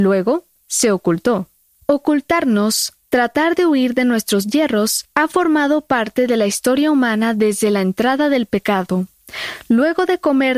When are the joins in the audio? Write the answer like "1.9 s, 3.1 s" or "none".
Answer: none